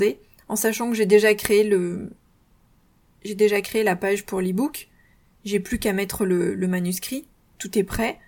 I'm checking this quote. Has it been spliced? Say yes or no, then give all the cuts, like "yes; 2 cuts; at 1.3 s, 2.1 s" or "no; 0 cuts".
no; 0 cuts